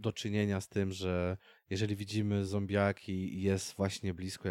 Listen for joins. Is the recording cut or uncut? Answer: uncut